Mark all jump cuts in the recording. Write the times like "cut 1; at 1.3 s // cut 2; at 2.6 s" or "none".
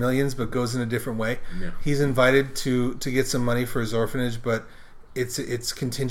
none

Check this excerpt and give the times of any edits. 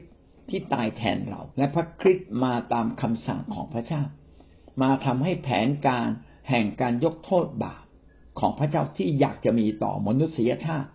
cut 1; at 1.5 s

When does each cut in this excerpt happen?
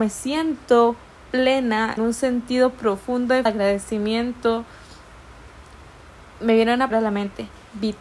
cut 1; at 2.0 s // cut 2; at 3.5 s // cut 3; at 6.9 s

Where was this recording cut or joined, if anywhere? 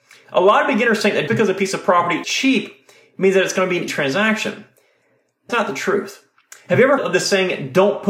cut 1; at 1.3 s // cut 2; at 2.2 s // cut 3; at 3.9 s // cut 4; at 5.5 s // cut 5; at 7.0 s

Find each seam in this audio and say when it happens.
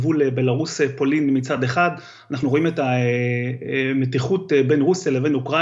none

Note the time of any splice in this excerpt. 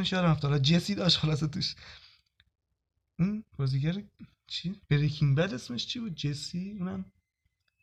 cut 1; at 3.5 s // cut 2; at 4.8 s

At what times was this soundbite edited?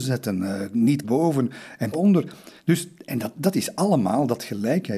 cut 1; at 1.0 s // cut 2; at 1.9 s // cut 3; at 2.6 s

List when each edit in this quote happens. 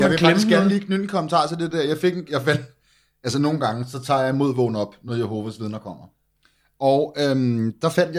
none

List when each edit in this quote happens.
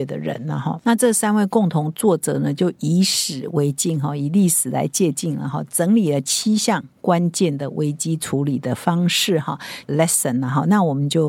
cut 1; at 9.9 s

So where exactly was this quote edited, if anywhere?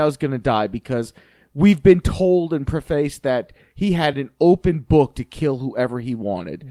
none

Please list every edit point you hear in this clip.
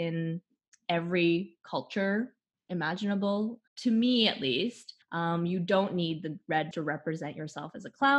cut 1; at 3.7 s // cut 2; at 5.0 s // cut 3; at 6.7 s

